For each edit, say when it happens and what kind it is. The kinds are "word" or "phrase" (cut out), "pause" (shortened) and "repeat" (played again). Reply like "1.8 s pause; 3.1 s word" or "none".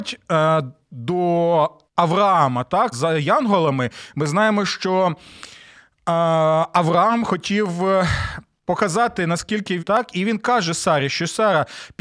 1.9 s pause; 2.9 s word; 9.8 s phrase